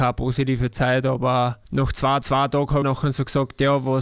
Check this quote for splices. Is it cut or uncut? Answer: cut